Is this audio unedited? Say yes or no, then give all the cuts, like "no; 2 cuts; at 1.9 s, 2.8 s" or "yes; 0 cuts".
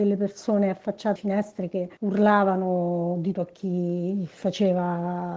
no; 3 cuts; at 1.2 s, 2.0 s, 3.3 s